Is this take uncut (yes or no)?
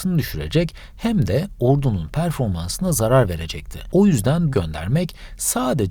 no